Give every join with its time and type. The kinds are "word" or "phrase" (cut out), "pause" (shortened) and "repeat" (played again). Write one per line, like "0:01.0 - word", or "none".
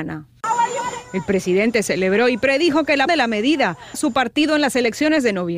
0:03.1 - word
0:03.9 - word